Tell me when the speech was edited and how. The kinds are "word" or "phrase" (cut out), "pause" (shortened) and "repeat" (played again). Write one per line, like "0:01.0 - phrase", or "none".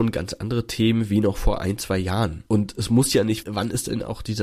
0:02.5 - pause
0:03.4 - word